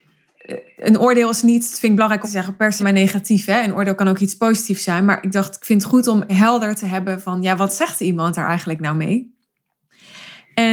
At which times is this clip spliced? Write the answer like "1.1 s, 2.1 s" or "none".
2.2 s, 2.8 s, 6.3 s

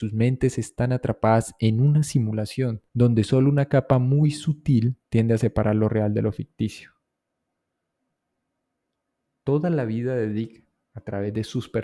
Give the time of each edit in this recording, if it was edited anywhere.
2.9 s, 5.0 s

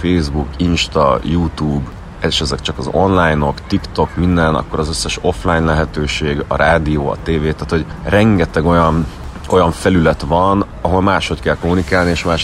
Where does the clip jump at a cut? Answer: none

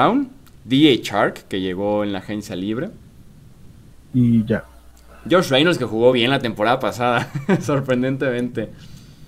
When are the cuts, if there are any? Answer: none

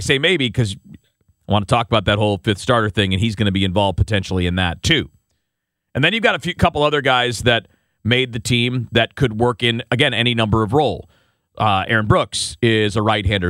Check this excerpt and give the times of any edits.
none

